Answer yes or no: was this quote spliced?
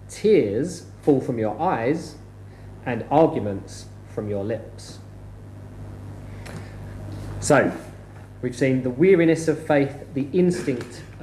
no